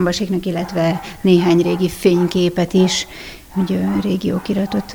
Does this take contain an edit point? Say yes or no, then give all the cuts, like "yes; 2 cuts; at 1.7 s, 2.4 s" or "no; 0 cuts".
no; 0 cuts